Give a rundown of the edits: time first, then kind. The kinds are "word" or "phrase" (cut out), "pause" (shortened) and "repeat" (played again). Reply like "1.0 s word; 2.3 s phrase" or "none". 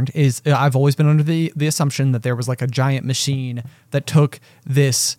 none